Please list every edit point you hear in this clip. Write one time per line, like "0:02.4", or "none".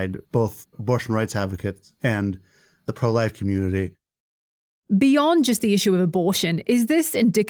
none